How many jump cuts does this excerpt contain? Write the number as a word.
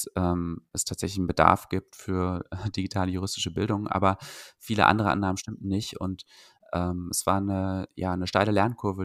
zero